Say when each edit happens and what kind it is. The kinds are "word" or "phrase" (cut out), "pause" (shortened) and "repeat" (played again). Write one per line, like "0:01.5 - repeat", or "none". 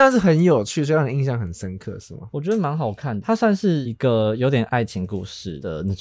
0:03.2 - word